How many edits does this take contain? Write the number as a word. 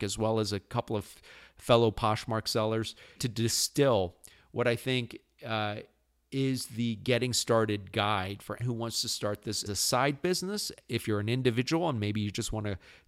three